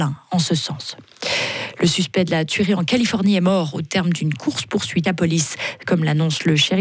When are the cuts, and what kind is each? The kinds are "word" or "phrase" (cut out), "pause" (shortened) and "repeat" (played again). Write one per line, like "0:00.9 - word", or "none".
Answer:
0:05.0 - word

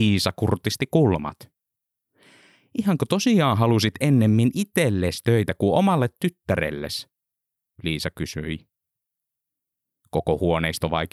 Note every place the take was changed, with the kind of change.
none

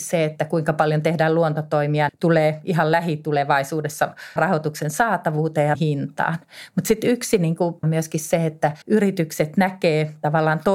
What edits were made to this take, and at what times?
0:02.1 - word
0:04.4 - word
0:05.7 - word
0:07.8 - phrase
0:08.8 - pause

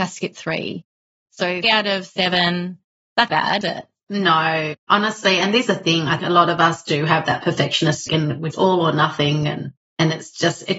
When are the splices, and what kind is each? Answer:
0:01.6 - word
0:03.3 - word
0:03.6 - word
0:05.7 - word
0:06.2 - word
0:08.1 - word
0:08.5 - word

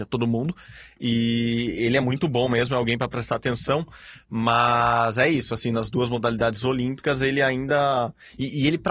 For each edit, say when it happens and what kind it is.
none

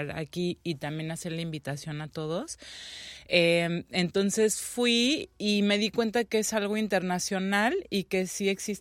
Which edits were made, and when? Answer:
none

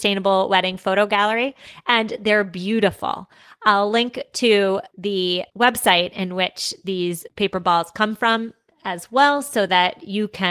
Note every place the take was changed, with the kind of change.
none

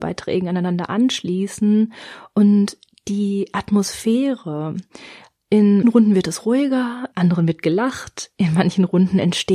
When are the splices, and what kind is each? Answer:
0:05.8 - word
0:07.1 - word

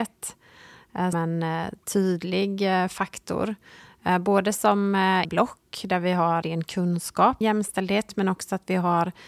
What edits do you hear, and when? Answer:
0:01.1 - word
0:05.2 - word
0:06.4 - word
0:07.4 - word

